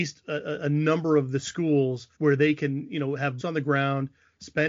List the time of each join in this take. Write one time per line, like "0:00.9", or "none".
0:02.1
0:03.4